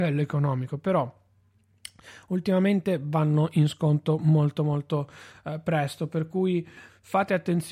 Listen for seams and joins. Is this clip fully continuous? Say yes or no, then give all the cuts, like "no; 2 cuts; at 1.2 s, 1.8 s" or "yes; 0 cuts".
yes; 0 cuts